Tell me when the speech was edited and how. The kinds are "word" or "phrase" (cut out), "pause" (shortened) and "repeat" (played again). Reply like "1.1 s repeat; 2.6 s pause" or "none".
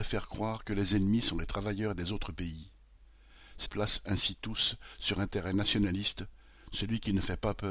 3.7 s phrase